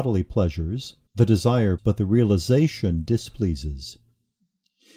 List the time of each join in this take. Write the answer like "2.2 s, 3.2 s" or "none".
1.1 s, 1.8 s